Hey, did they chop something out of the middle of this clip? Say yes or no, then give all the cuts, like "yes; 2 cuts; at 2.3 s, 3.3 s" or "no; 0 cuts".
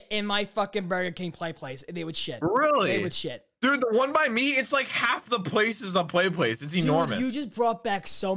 no; 0 cuts